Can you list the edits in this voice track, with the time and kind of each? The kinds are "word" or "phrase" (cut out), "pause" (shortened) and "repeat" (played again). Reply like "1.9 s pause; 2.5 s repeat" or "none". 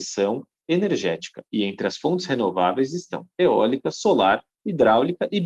1.5 s pause